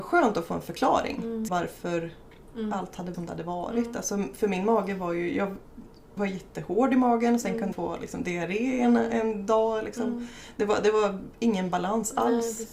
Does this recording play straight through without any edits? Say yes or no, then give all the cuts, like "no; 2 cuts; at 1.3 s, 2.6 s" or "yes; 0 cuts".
no; 4 cuts; at 1.5 s, 3.1 s, 6.2 s, 7.7 s